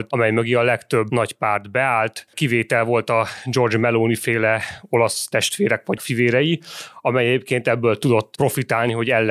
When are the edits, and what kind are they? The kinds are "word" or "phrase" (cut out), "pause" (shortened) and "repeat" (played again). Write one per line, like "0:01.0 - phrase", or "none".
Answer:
0:06.0 - word